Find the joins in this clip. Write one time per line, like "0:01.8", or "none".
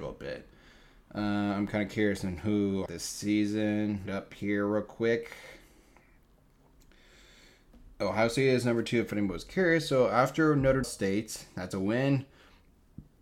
0:02.9
0:04.1
0:10.8